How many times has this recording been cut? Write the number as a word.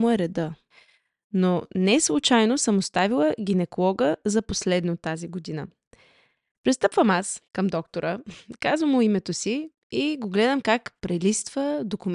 one